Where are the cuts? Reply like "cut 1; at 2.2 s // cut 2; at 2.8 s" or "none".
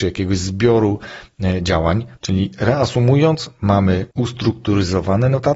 cut 1; at 4.1 s